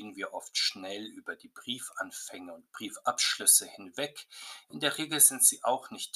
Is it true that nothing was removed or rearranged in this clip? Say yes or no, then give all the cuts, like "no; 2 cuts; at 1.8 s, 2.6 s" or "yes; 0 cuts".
yes; 0 cuts